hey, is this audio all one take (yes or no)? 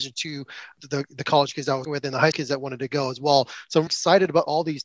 no